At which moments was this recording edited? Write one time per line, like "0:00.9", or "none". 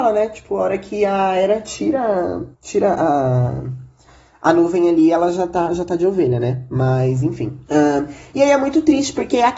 0:02.5
0:07.7